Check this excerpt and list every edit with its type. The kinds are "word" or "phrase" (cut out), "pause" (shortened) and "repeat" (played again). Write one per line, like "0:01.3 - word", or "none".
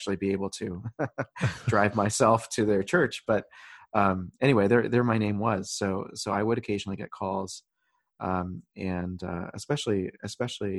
none